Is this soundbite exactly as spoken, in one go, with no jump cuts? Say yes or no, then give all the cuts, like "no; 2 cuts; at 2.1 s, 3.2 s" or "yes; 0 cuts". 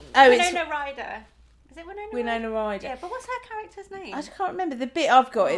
yes; 0 cuts